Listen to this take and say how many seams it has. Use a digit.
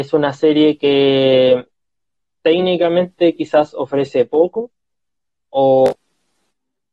0